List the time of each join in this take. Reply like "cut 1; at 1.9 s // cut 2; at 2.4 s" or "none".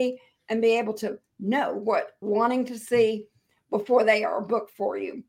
cut 1; at 2.2 s

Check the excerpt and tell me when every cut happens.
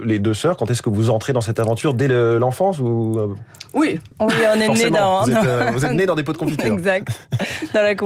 cut 1; at 4.1 s

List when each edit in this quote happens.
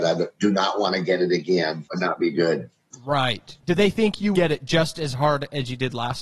cut 1; at 4.3 s

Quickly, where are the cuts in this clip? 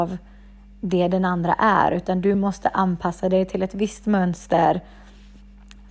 none

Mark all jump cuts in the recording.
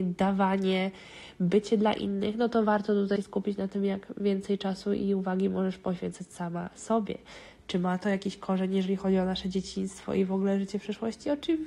cut 1; at 3.2 s

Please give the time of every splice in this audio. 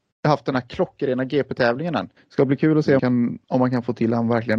cut 1; at 2.2 s // cut 2; at 3.0 s // cut 3; at 3.4 s

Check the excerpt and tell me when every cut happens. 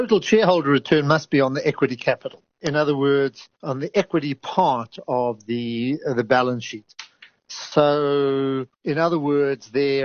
cut 1; at 3.5 s // cut 2; at 8.7 s

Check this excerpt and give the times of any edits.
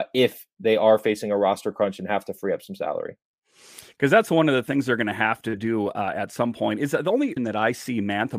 cut 1; at 7.4 s

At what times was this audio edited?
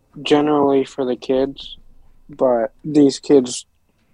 cut 1; at 2.8 s

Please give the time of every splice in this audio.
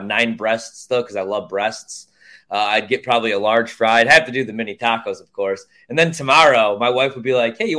none

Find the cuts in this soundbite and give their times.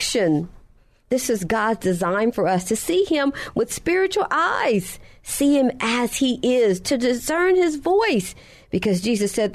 none

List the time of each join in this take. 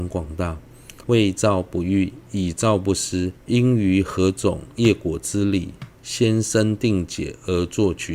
cut 1; at 1.0 s // cut 2; at 3.4 s // cut 3; at 5.9 s

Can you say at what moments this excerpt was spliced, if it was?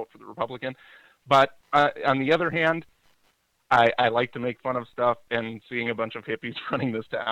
none

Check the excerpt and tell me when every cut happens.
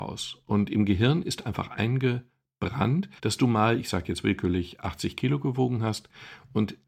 cut 1; at 3.2 s

